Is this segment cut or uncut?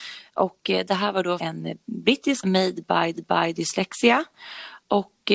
cut